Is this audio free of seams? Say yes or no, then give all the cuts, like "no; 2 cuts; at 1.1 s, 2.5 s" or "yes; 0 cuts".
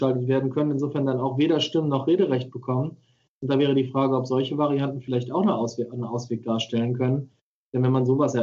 yes; 0 cuts